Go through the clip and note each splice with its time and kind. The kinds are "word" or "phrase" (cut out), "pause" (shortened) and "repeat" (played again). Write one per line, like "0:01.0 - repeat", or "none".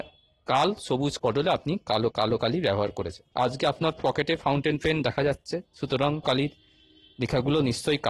0:01.2 - word
0:02.1 - repeat
0:03.3 - pause
0:06.2 - word